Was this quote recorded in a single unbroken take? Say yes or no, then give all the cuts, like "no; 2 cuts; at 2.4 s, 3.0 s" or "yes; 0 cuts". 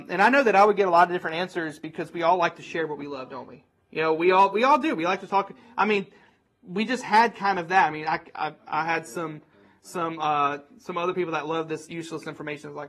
yes; 0 cuts